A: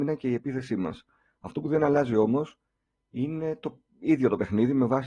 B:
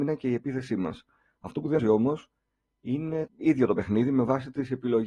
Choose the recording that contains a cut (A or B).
B